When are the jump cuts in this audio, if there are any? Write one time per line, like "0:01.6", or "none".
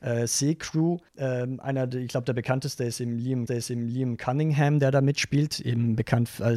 0:01.1
0:03.5